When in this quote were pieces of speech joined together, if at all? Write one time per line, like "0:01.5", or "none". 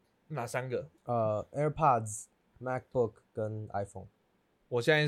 0:01.0